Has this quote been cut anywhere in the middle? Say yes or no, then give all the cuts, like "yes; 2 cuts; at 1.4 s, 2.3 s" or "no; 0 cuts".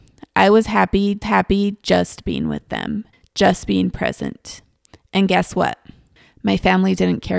yes; 2 cuts; at 1.2 s, 3.1 s